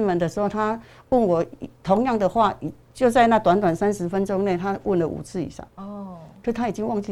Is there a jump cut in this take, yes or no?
yes